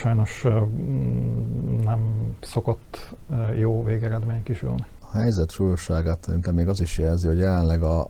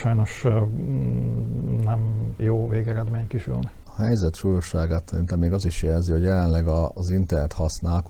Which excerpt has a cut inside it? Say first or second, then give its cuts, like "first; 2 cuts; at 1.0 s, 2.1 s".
second; 1 cut; at 2.4 s